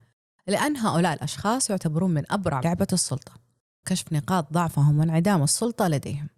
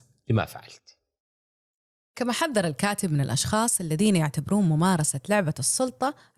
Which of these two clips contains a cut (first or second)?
first